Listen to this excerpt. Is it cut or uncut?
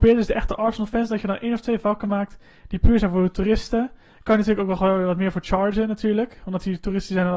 uncut